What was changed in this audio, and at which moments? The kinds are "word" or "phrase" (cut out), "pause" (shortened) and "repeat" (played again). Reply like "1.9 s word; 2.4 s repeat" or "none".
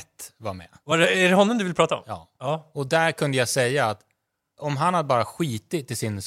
none